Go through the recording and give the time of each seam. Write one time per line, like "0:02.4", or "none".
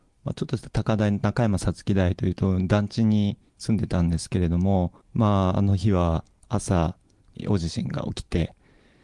0:05.0